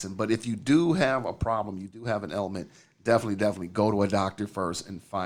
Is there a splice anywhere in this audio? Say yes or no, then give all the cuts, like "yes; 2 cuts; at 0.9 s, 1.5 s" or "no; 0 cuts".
no; 0 cuts